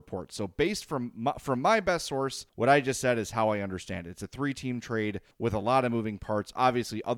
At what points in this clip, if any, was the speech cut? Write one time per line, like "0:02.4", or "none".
0:02.5
0:05.3